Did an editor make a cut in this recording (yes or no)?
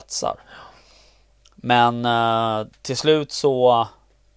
no